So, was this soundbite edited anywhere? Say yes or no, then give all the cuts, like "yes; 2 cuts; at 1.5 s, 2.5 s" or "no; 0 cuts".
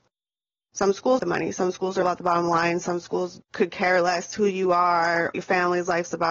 yes; 4 cuts; at 1.2 s, 2.0 s, 3.4 s, 5.3 s